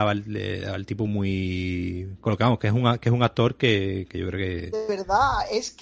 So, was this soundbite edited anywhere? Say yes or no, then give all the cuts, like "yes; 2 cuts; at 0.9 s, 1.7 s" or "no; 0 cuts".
no; 0 cuts